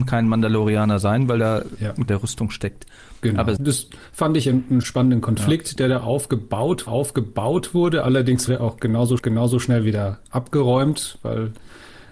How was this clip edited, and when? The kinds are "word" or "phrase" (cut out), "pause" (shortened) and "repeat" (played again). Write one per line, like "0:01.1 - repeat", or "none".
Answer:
0:02.1 - phrase
0:03.6 - phrase
0:04.8 - word
0:06.9 - repeat
0:08.5 - word
0:09.2 - repeat